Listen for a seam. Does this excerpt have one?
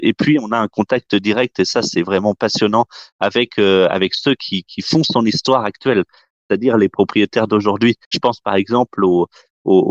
yes; 1 cut; at 8.0 s

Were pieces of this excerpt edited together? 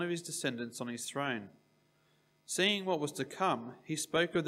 no; 0 cuts

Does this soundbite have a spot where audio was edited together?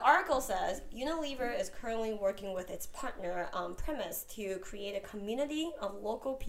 no; 0 cuts

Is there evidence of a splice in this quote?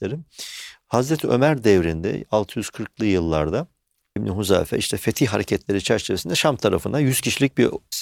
yes; 1 cut; at 4.2 s

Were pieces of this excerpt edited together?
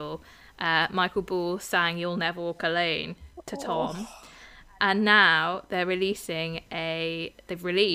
no; 0 cuts

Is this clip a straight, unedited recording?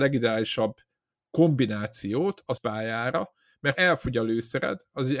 no; 2 cuts; at 2.6 s, 3.8 s

